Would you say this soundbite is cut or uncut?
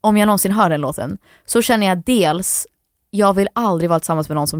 uncut